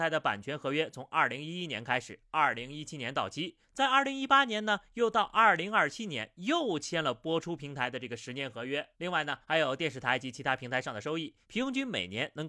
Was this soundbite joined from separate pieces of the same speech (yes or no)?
yes